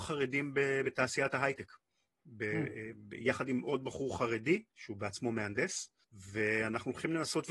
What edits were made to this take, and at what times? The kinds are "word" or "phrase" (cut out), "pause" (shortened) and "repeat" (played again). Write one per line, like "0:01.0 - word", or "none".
0:04.7 - pause
0:06.0 - pause